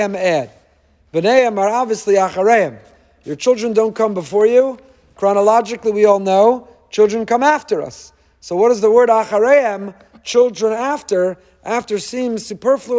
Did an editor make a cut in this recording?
no; 0 cuts

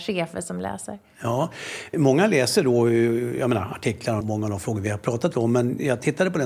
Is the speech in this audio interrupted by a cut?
yes; 2 cuts; at 1.9 s, 4.2 s

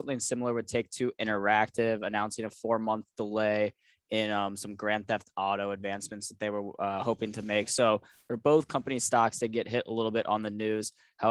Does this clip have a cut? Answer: no; 0 cuts

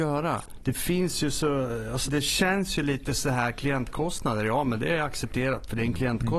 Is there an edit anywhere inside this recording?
yes; 1 cut; at 2.1 s

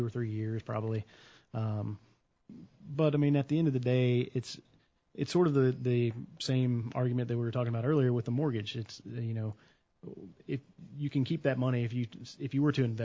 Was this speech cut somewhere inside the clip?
no; 0 cuts

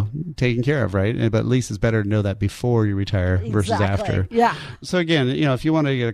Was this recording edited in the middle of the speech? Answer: no; 0 cuts

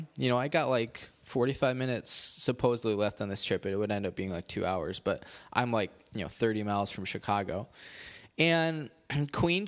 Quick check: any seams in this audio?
no; 0 cuts

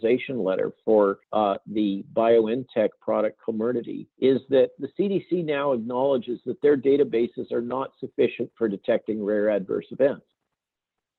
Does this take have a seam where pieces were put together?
yes; 2 cuts; at 1.2 s, 4.1 s

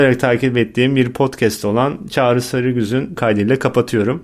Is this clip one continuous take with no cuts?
no; 1 cut; at 3.2 s

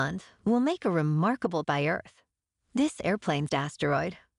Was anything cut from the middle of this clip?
yes; 2 cuts; at 1.6 s, 3.5 s

